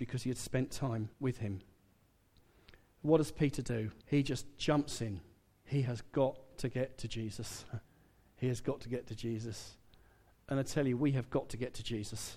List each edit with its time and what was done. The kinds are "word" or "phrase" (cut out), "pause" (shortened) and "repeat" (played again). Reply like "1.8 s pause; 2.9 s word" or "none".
1.1 s pause; 4.0 s pause; 7.8 s pause